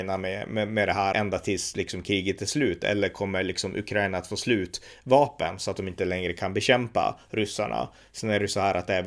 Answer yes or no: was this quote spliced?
yes